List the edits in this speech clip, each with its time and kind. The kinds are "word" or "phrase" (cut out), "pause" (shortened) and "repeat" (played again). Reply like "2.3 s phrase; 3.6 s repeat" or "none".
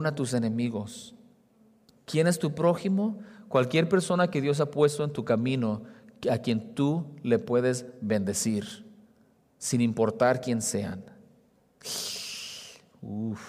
none